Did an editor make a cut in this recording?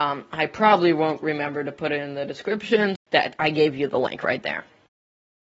yes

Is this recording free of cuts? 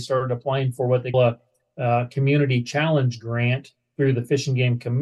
no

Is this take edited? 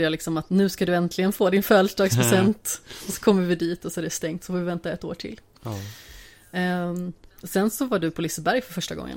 no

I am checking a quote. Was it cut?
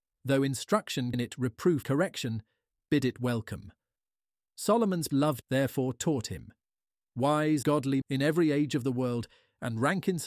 yes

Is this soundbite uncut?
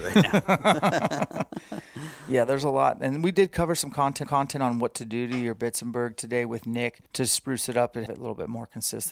no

